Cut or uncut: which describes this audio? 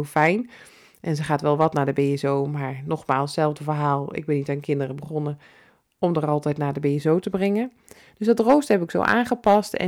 uncut